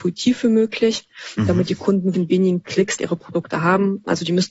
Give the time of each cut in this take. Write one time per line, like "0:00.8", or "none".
0:02.1
0:03.0